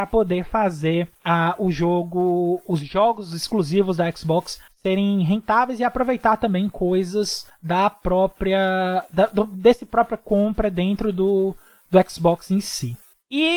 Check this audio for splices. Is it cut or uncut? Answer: uncut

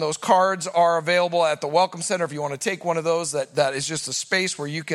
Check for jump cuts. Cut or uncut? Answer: uncut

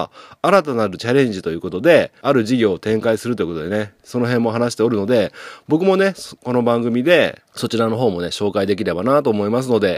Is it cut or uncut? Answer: cut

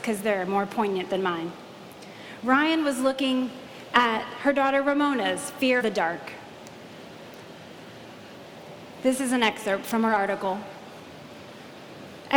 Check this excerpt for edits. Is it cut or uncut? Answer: cut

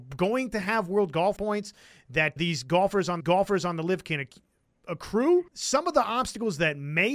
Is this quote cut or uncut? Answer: cut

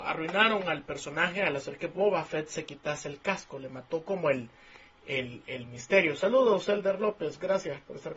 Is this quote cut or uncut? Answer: uncut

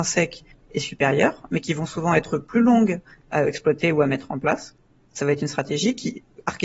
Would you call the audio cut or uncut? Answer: uncut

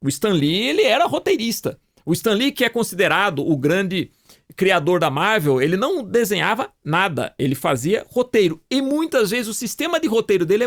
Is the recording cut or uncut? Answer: uncut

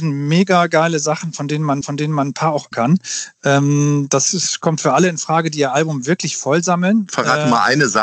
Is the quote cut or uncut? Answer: cut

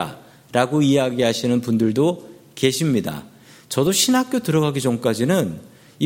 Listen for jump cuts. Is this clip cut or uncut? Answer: uncut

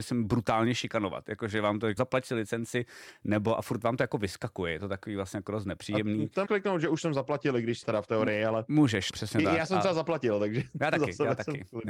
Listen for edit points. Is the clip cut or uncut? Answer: cut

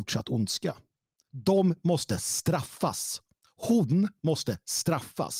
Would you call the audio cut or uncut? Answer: uncut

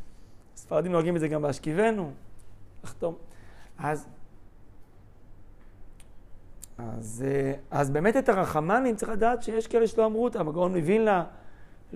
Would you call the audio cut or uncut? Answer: uncut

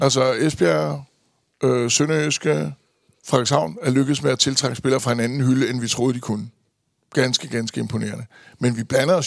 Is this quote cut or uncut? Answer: uncut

